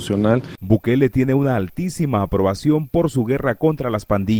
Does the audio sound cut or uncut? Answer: uncut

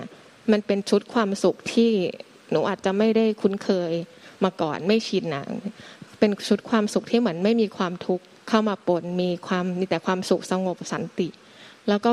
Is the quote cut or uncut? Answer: cut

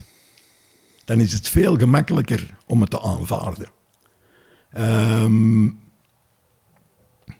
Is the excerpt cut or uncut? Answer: uncut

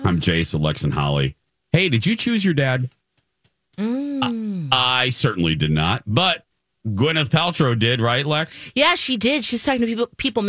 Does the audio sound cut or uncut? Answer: uncut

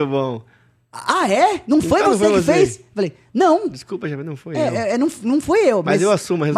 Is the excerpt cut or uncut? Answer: uncut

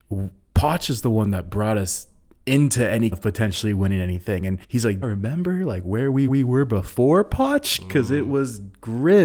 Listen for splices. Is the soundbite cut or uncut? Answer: cut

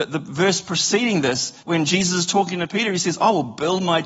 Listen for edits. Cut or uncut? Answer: cut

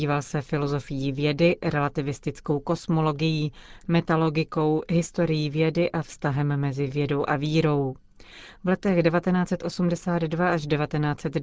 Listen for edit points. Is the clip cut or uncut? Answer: uncut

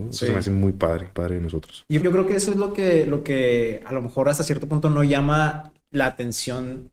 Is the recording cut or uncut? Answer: cut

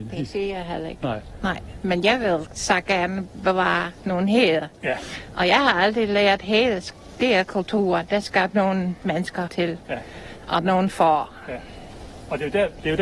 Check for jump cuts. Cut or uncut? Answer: cut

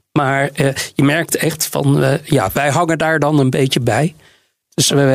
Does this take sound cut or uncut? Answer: uncut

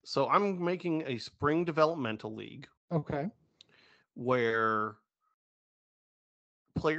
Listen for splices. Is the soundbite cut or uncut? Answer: cut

